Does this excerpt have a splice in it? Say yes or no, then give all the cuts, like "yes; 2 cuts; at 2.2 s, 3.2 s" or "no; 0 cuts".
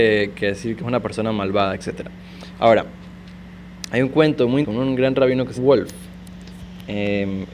yes; 2 cuts; at 4.6 s, 5.5 s